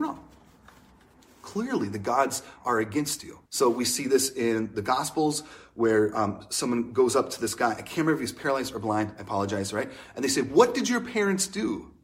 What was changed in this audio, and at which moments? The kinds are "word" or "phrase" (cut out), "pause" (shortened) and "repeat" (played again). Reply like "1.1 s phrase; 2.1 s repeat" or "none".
3.5 s pause